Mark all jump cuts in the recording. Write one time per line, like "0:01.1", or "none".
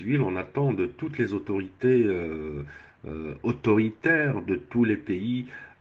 none